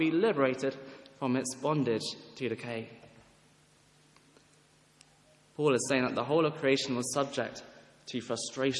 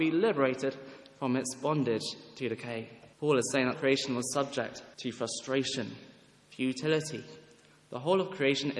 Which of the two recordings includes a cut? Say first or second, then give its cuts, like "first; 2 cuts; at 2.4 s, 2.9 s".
second; 3 cuts; at 3.1 s, 3.7 s, 4.9 s